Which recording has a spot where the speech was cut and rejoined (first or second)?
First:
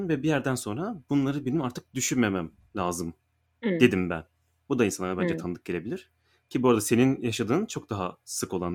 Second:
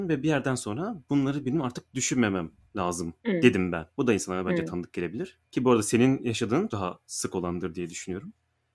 second